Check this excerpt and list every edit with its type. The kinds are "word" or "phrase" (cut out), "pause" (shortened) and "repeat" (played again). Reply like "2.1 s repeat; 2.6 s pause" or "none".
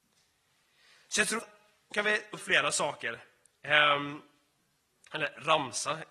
1.4 s word; 1.9 s word; 2.3 s word